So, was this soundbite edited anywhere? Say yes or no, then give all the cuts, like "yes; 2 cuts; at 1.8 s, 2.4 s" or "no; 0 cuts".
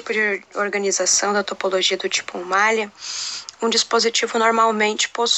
no; 0 cuts